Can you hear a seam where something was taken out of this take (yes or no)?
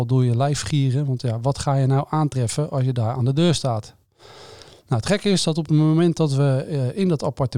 no